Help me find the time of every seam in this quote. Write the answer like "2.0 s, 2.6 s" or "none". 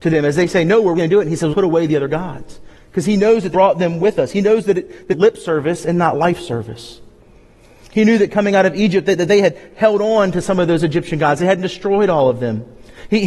1.0 s, 1.5 s, 3.5 s, 5.1 s